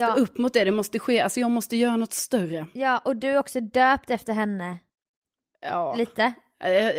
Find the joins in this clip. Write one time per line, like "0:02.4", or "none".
none